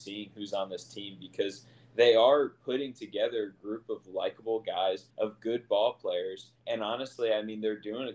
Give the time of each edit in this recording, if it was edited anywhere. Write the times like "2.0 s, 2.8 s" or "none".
5.1 s, 6.6 s